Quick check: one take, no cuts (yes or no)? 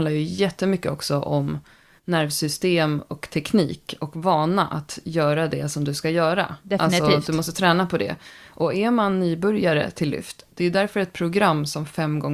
yes